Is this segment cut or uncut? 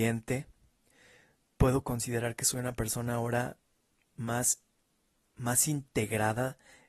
uncut